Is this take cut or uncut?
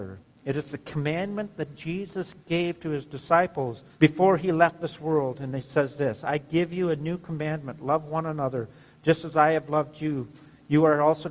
cut